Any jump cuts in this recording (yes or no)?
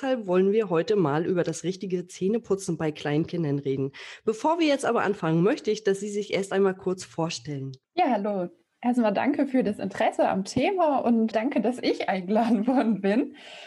yes